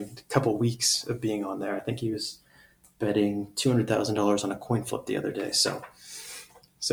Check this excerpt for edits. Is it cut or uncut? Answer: uncut